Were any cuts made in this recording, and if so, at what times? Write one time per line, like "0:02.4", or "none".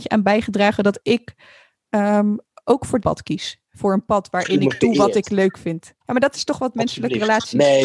0:02.5
0:03.0
0:06.0